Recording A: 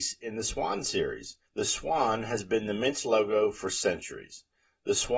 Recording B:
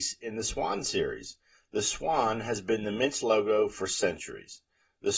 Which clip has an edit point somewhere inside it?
A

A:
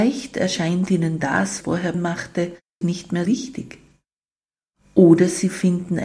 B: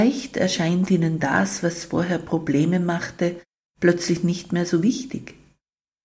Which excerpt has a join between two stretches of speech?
A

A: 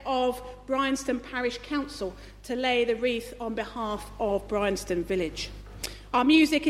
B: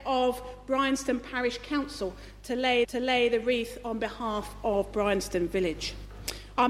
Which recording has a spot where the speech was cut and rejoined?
B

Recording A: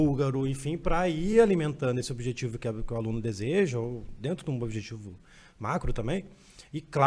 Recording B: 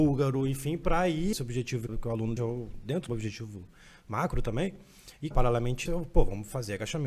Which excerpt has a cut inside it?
B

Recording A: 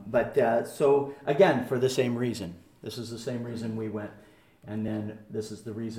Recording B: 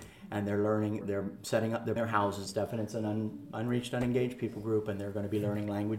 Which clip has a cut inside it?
B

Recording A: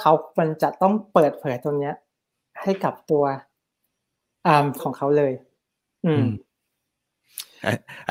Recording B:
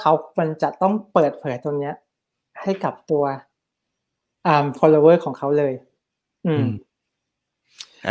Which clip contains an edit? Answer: A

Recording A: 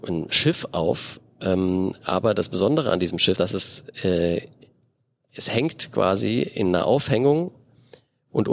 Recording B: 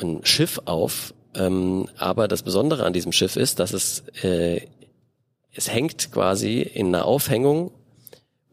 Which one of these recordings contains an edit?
A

